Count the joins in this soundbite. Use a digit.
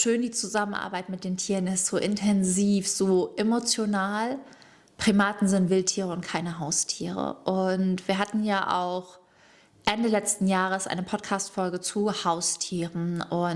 0